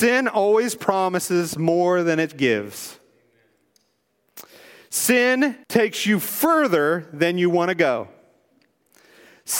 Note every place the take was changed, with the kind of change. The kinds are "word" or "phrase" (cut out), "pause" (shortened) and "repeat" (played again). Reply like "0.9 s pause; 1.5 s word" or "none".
5.6 s pause